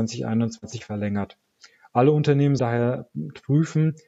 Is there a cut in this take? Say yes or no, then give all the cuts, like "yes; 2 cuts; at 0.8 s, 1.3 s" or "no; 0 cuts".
yes; 1 cut; at 2.6 s